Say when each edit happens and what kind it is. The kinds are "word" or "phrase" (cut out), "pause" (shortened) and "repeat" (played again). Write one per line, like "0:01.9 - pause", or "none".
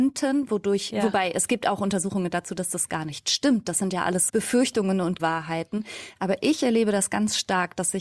0:04.3 - word
0:05.2 - word

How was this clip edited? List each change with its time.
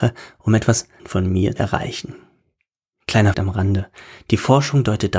0:01.0 - word
0:01.6 - word
0:03.3 - word

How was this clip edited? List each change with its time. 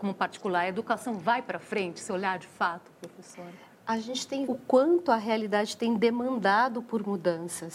0:02.1 - phrase
0:03.7 - pause
0:04.5 - word

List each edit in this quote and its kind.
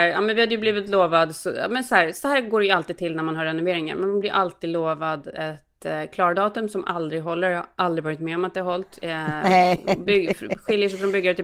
none

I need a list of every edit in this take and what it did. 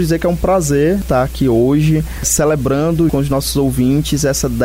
0:03.1 - word

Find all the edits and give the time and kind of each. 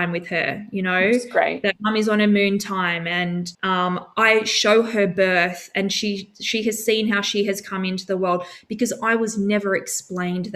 0:03.5 - pause

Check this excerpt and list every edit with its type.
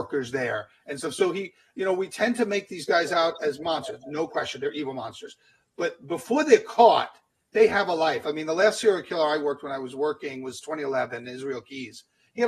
none

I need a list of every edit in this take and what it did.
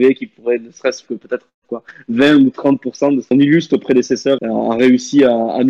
0:01.1 - word
0:01.5 - pause
0:03.3 - phrase
0:04.4 - word

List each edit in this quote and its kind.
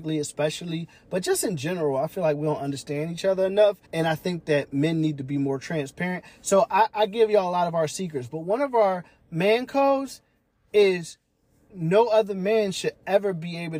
0:03.8 - pause

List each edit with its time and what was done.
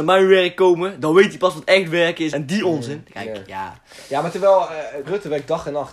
0:02.3 - word
0:05.0 - word

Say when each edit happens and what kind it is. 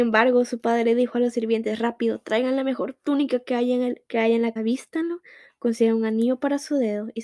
0:04.1 - pause
0:04.6 - word

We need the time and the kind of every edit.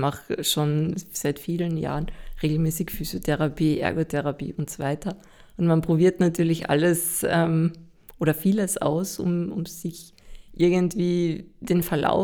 none

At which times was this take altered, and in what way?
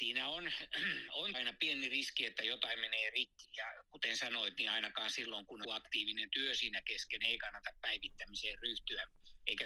0:01.3 - word
0:03.4 - word
0:05.6 - word

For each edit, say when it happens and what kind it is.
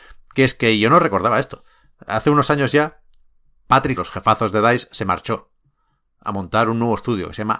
0:04.0 - phrase

